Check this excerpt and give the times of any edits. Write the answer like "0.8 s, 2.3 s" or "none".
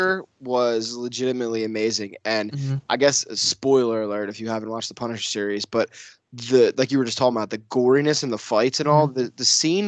none